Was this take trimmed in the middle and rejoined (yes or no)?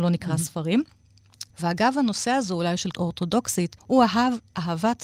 yes